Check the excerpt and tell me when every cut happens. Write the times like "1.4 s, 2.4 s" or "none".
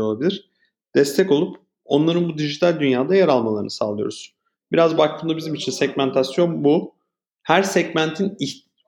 none

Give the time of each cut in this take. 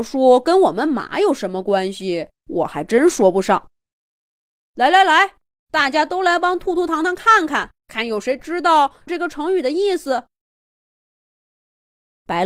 2.4 s, 3.9 s, 5.5 s, 7.8 s

